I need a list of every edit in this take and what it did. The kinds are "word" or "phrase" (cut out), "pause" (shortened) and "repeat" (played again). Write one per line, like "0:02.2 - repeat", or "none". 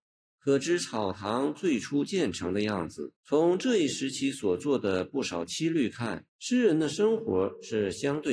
0:03.2 - pause
0:06.3 - pause